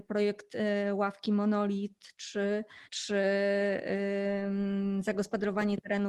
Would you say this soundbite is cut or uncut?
cut